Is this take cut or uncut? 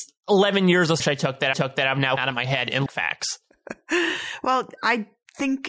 cut